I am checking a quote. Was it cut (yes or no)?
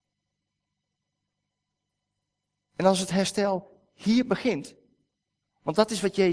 no